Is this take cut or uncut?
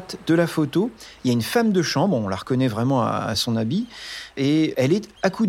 uncut